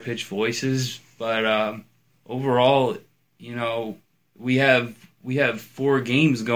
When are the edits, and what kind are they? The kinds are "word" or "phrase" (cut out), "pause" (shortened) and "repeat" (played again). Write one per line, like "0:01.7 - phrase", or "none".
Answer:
0:02.1 - pause
0:04.2 - pause